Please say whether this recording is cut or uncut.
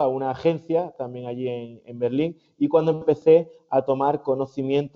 uncut